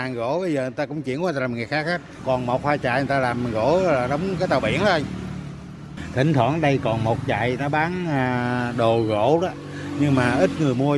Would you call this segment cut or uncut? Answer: uncut